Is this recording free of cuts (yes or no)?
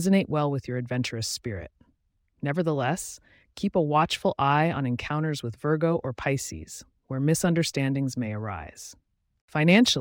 yes